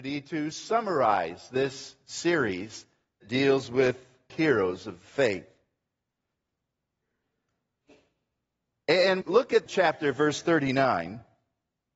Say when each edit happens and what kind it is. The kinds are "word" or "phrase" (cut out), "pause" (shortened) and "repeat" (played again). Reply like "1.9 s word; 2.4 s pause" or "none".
3.2 s word; 4.3 s phrase; 9.2 s word; 9.7 s phrase